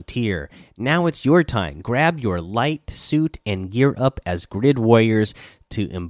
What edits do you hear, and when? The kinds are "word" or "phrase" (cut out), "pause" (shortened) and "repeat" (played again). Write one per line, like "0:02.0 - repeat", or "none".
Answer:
none